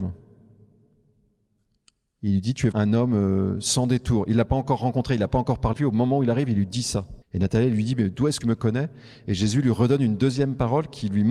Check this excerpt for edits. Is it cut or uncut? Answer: cut